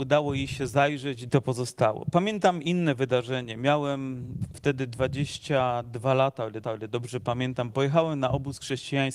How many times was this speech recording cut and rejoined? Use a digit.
2